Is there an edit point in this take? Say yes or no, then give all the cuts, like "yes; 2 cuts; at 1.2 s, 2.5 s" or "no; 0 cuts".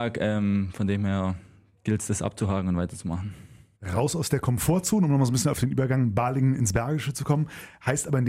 no; 0 cuts